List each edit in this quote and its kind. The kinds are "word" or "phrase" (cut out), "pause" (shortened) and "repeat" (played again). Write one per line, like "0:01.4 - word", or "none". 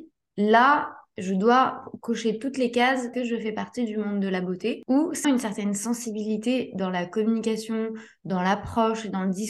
0:03.1 - word
0:05.2 - word